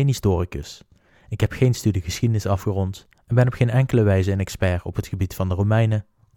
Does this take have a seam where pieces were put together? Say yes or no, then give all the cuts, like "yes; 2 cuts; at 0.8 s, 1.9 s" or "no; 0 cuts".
no; 0 cuts